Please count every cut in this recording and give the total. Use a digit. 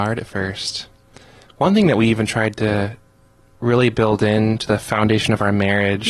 0